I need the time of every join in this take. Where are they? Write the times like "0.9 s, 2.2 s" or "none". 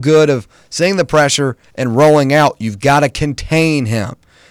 none